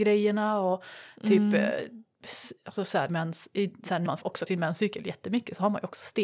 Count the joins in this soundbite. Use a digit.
3